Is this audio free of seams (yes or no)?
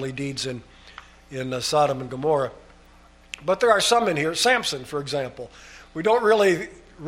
yes